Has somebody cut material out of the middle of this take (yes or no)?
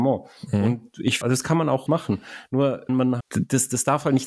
yes